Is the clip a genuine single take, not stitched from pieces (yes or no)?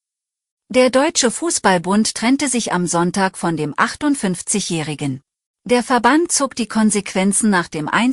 no